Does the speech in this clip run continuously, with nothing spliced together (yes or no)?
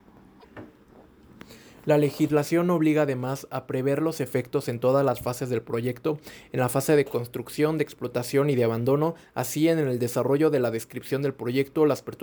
yes